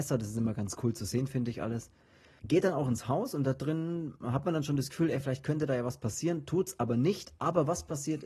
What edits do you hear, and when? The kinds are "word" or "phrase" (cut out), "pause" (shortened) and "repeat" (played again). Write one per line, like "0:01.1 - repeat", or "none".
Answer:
none